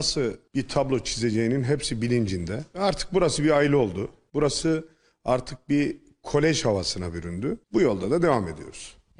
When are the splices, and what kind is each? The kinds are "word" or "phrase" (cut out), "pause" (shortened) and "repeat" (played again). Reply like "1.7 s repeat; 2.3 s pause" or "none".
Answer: none